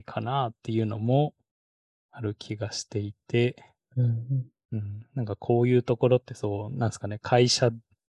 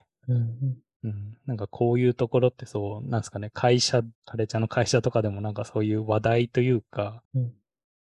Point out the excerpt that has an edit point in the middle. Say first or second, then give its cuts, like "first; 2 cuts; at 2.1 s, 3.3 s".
second; 2 cuts; at 4.1 s, 7.2 s